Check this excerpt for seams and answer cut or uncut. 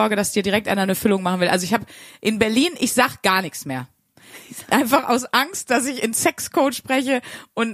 uncut